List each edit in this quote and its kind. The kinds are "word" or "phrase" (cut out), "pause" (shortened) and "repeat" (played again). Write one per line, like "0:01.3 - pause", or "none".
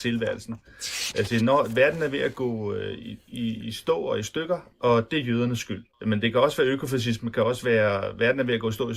0:05.9 - pause